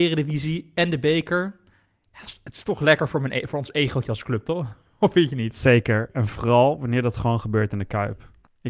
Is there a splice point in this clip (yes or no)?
no